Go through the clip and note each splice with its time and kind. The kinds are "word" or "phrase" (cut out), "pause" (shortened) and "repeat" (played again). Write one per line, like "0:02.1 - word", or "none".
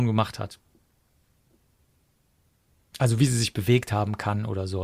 none